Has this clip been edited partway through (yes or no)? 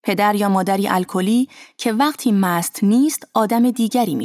no